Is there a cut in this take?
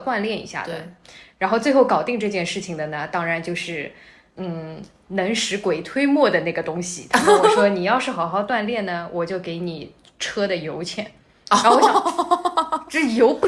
no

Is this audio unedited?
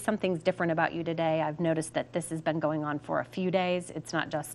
yes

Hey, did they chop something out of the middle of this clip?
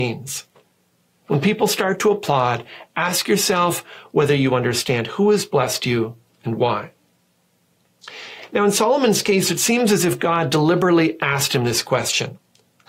no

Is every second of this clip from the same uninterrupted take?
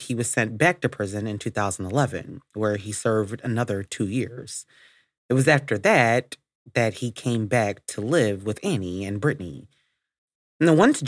yes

